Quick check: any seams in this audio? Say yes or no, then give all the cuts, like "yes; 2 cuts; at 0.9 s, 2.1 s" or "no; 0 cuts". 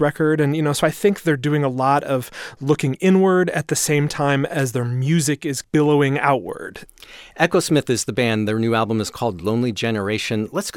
no; 0 cuts